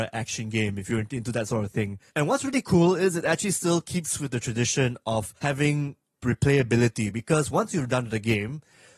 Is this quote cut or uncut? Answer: cut